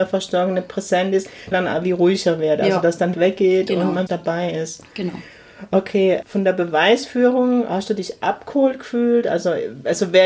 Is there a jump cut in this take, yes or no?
yes